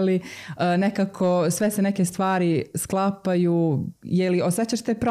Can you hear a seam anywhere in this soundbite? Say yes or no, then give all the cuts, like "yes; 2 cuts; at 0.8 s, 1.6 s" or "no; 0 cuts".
yes; 1 cut; at 4.0 s